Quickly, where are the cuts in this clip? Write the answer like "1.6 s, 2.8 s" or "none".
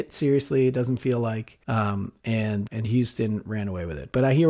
1.6 s, 2.7 s